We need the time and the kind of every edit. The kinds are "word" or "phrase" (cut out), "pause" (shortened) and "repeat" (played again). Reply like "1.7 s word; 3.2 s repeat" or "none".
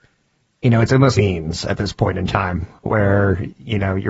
1.1 s phrase; 2.8 s pause